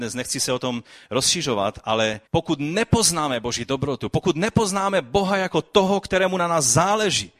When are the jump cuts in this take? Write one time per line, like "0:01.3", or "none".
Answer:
0:02.3